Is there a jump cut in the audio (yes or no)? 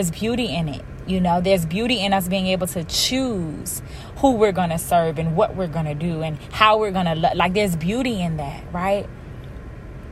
no